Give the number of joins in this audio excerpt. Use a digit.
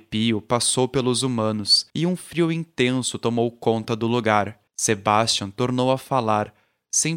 2